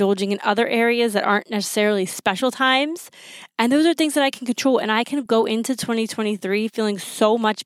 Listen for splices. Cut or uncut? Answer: uncut